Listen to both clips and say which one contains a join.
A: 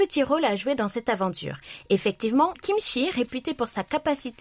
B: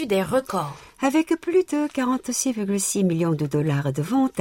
A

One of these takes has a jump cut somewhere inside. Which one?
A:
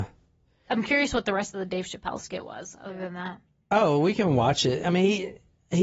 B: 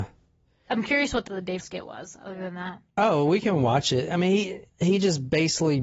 B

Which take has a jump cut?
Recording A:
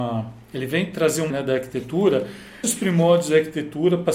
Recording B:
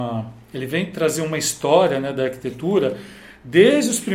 A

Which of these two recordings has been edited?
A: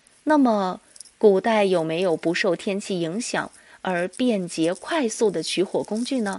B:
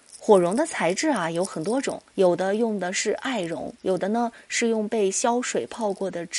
B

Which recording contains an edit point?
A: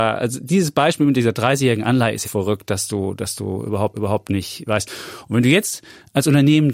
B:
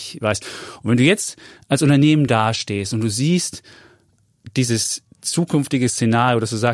A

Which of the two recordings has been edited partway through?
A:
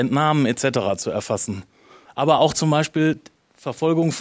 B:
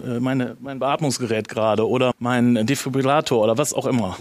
B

